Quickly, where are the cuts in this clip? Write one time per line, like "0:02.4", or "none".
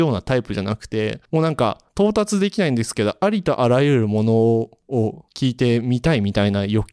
none